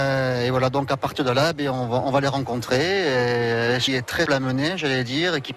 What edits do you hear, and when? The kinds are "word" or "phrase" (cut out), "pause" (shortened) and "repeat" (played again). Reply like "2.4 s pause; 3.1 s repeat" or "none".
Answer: 3.9 s phrase; 4.3 s word